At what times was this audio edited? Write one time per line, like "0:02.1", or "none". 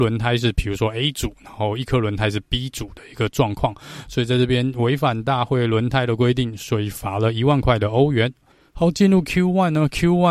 0:08.5